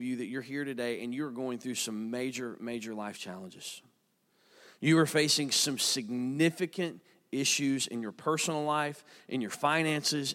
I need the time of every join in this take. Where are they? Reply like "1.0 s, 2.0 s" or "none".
none